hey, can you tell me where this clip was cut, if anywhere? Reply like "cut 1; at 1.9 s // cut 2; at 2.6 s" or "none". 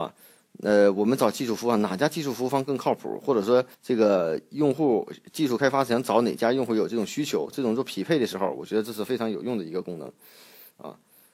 cut 1; at 3.7 s